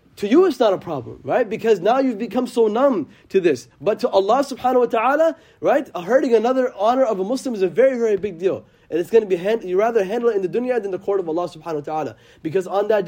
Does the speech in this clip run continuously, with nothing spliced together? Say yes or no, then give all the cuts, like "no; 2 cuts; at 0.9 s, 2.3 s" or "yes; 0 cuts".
yes; 0 cuts